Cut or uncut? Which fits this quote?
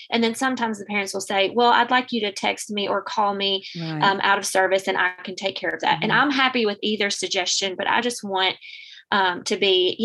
uncut